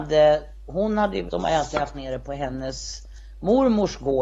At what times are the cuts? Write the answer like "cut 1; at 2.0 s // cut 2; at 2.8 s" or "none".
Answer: cut 1; at 1.3 s // cut 2; at 1.9 s

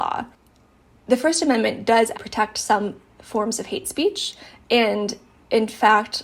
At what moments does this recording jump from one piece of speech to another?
cut 1; at 2.1 s

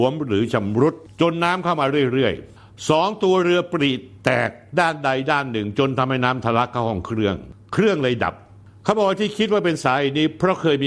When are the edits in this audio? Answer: none

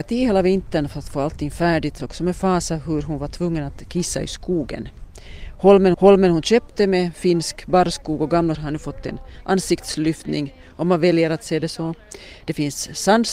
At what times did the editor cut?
cut 1; at 2.0 s // cut 2; at 5.9 s // cut 3; at 8.5 s

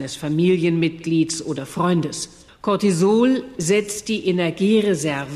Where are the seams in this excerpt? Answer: cut 1; at 2.5 s

